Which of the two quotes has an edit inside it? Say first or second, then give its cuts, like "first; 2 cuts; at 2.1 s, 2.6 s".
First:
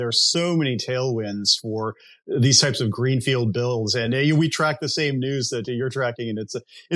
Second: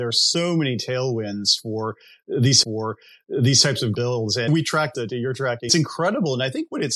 second; 5 cuts; at 2.6 s, 3.9 s, 4.5 s, 4.9 s, 5.7 s